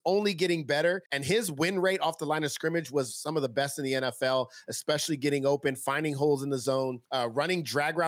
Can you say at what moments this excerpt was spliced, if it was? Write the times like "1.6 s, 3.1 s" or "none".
1.1 s, 7.0 s